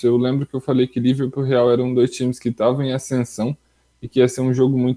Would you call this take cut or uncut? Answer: uncut